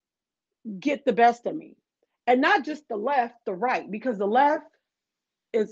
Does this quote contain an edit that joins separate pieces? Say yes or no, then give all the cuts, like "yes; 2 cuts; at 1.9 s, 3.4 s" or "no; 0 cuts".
no; 0 cuts